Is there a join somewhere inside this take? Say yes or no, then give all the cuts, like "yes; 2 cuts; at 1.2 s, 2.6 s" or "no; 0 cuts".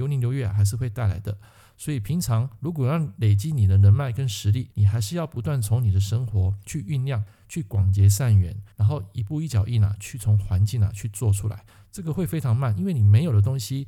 yes; 2 cuts; at 4.7 s, 8.7 s